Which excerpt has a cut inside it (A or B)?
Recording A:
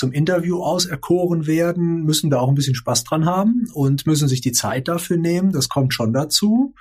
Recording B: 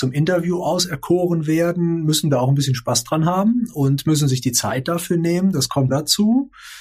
B